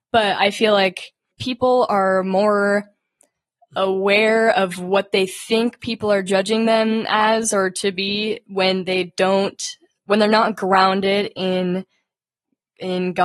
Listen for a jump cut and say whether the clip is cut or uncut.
cut